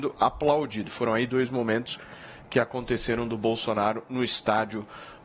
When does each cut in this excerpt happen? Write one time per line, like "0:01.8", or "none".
none